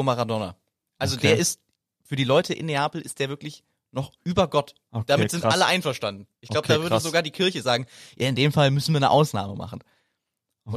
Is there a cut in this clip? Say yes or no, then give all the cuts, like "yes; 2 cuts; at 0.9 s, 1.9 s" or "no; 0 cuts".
no; 0 cuts